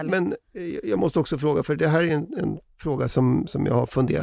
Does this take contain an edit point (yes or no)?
no